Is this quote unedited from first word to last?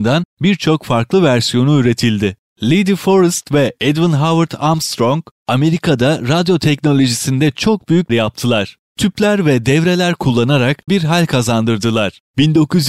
no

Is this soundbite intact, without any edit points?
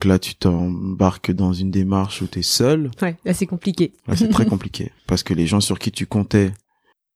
no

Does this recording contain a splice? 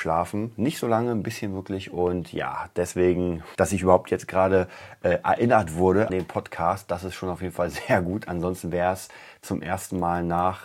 yes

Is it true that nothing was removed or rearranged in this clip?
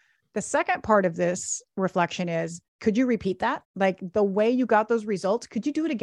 no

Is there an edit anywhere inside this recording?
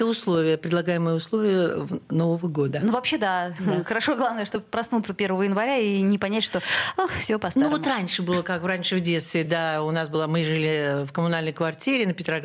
no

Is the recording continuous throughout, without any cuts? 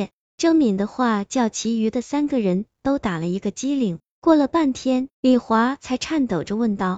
no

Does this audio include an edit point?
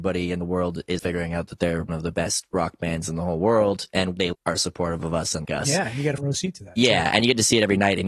yes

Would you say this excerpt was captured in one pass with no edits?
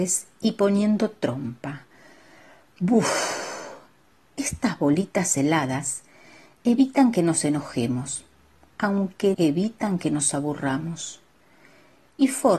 no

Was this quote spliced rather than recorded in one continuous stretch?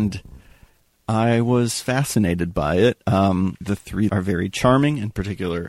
yes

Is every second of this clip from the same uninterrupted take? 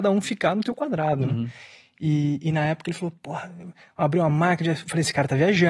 yes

